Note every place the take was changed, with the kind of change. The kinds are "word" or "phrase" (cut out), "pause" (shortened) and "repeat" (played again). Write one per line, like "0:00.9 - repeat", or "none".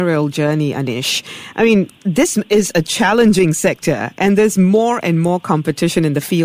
none